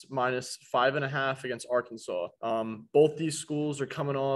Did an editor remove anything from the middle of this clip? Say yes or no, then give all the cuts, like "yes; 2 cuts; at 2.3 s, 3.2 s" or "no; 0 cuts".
yes; 1 cut; at 2.4 s